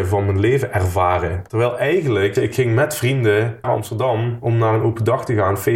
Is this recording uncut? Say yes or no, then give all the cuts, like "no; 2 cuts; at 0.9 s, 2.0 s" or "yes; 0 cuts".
no; 2 cuts; at 2.4 s, 3.6 s